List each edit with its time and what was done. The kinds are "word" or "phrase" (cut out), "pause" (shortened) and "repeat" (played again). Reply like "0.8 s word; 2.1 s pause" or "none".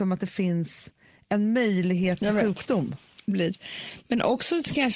3.3 s phrase